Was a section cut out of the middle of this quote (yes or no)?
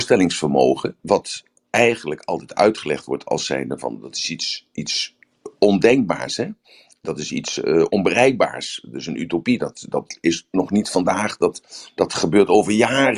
yes